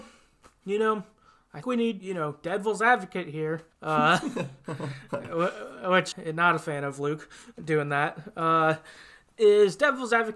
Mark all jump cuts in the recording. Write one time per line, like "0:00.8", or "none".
0:01.6
0:02.0
0:03.7
0:06.1
0:07.5